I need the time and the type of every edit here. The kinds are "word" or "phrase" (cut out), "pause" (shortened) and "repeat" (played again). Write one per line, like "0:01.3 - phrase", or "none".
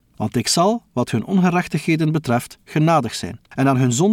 none